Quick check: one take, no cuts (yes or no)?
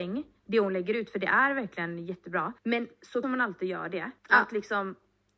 no